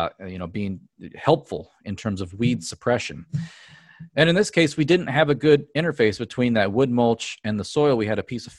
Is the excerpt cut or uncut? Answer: uncut